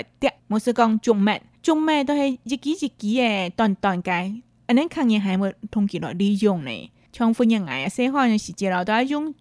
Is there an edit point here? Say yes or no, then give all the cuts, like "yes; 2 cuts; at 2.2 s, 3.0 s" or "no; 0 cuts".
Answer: no; 0 cuts